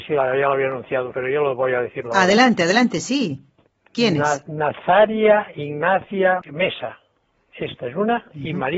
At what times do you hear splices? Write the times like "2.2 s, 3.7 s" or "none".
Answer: 1.1 s, 6.4 s